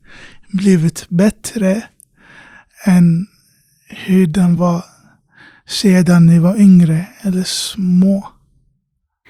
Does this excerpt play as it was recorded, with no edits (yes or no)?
yes